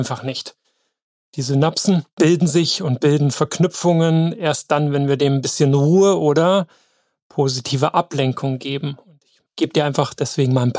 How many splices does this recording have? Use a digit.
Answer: 0